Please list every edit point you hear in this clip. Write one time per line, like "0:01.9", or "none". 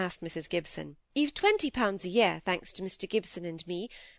0:01.0

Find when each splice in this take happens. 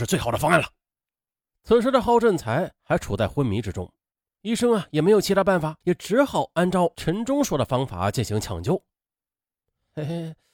0:05.8

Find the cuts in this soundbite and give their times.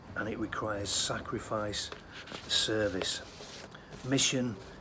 0:02.4

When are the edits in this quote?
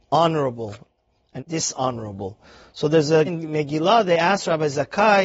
0:01.4
0:03.3

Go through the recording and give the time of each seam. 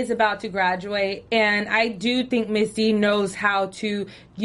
none

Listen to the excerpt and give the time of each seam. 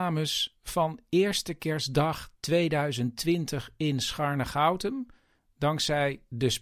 none

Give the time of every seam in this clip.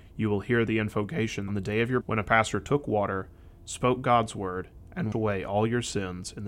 0:01.5
0:02.0
0:05.1

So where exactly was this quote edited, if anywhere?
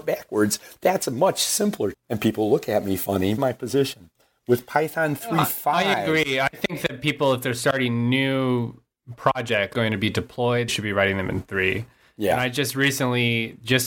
0:01.9
0:03.4
0:09.7
0:10.7

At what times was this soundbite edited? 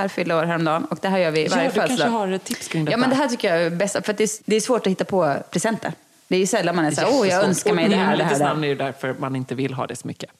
none

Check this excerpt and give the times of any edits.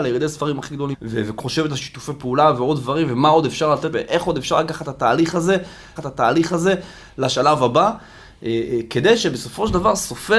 0:00.9
0:01.4
0:03.9
0:06.0

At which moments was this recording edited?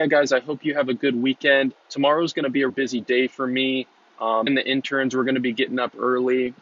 0:01.8
0:02.7
0:04.5

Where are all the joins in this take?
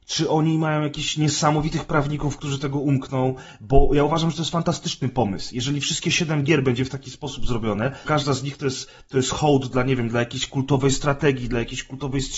0:08.0

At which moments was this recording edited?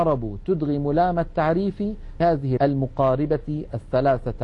0:02.2
0:02.6

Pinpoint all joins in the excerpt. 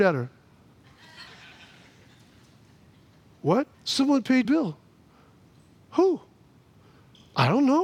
0:01.3
0:03.7
0:04.4

